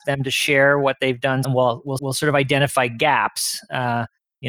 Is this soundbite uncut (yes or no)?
no